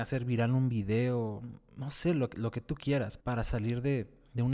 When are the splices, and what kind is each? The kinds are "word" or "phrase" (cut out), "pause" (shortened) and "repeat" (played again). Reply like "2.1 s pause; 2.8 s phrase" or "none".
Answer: 3.2 s word